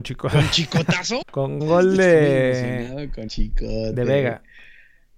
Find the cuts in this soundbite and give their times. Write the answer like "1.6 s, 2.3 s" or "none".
1.2 s, 1.6 s, 3.3 s